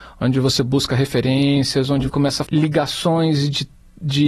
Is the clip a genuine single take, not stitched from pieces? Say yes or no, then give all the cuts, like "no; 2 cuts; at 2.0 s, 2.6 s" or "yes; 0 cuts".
no; 2 cuts; at 2.1 s, 2.5 s